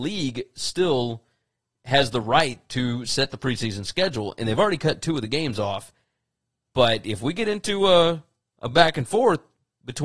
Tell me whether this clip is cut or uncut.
uncut